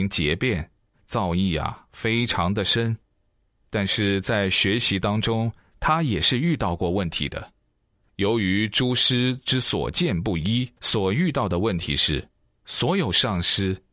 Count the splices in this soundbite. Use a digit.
2